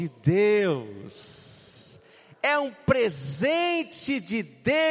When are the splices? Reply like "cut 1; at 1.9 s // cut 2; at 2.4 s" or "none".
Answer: none